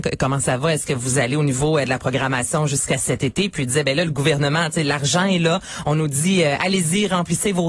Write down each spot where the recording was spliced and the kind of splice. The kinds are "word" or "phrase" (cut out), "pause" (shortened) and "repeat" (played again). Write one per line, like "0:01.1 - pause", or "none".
none